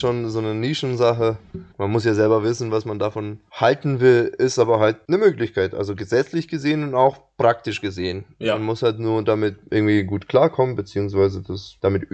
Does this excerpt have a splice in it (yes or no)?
yes